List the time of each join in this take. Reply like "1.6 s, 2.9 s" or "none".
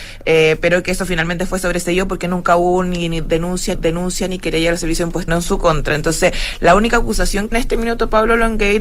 3.7 s, 5.3 s, 7.5 s